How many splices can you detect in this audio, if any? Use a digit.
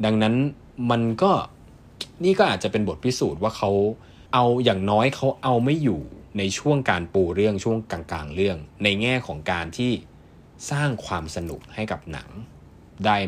2